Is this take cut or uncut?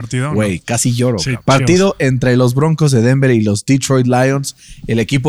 cut